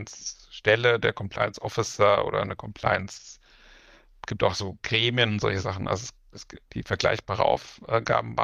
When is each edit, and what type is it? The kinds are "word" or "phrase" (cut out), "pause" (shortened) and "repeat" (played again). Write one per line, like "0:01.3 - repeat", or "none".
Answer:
none